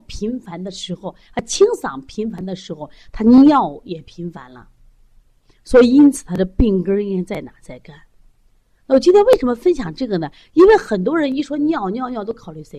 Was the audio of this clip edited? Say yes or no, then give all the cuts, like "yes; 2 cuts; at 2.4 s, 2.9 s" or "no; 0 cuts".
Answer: no; 0 cuts